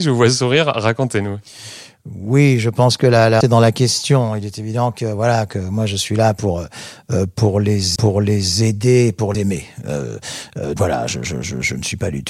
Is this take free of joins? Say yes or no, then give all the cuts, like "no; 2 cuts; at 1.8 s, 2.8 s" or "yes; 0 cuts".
no; 4 cuts; at 3.4 s, 8.0 s, 9.3 s, 10.8 s